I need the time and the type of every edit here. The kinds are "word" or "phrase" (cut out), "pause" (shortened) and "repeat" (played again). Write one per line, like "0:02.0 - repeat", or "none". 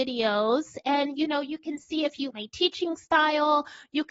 0:02.3 - word